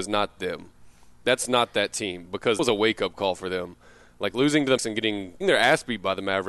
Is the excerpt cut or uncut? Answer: cut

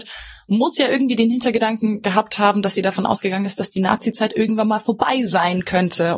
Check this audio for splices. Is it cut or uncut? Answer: uncut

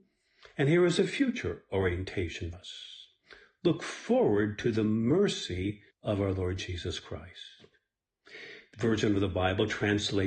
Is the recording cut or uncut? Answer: cut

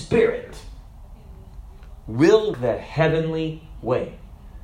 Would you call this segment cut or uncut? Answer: cut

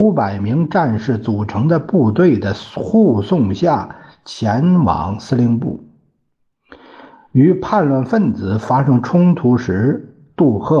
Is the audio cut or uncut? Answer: uncut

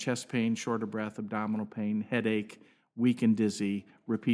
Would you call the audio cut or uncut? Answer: uncut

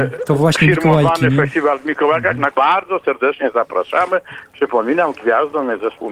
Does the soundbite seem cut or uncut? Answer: cut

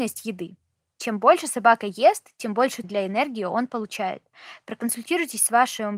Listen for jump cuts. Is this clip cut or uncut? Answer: cut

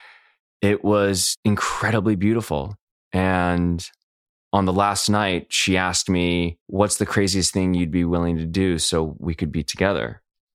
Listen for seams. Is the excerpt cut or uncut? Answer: uncut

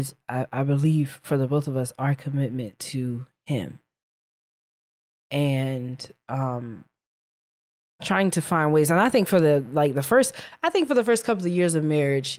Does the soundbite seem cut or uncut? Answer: uncut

